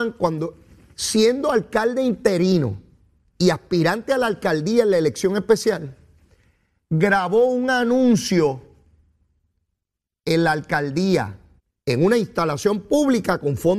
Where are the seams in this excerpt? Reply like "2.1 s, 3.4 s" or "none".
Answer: 11.6 s